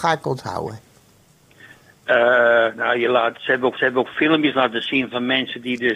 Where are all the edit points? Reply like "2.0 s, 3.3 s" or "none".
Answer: 3.8 s